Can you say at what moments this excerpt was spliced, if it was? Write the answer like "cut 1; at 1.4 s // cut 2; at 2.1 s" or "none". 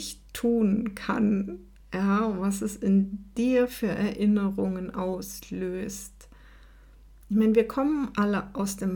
none